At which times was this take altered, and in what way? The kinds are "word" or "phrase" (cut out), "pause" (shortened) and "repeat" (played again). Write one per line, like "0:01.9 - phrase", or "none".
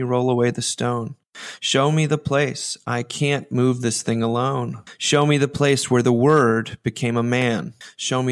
none

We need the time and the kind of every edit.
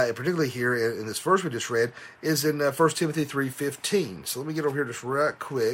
none

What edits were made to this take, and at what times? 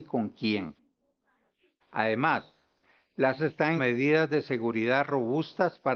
0:03.4 - word
0:03.8 - word

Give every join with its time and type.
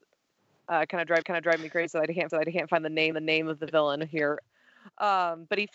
0:01.2 - repeat
0:02.3 - repeat
0:03.1 - repeat
0:04.4 - word

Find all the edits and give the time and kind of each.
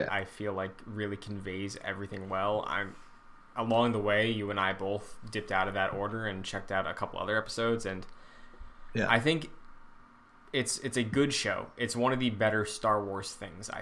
none

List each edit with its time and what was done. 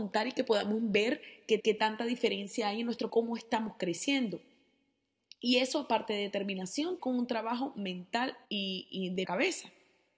0:01.6 - repeat
0:03.1 - word
0:07.0 - phrase
0:08.4 - pause
0:09.2 - word

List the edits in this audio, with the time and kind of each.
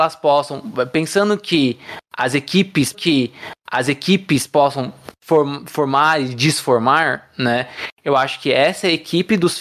0:02.9 - repeat

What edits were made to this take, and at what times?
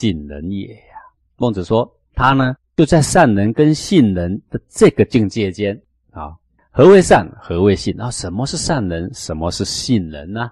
none

